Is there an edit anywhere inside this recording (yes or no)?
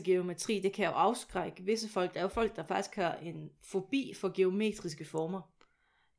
no